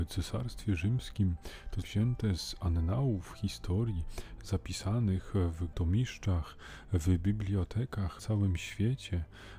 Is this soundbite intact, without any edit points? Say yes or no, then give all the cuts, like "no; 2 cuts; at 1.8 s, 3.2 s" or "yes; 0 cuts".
no; 3 cuts; at 1.8 s, 5.7 s, 8.2 s